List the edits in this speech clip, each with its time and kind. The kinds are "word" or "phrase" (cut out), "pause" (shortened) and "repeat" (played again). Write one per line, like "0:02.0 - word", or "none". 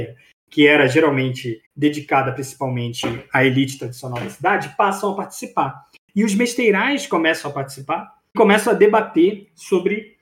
0:01.6 - pause
0:08.3 - word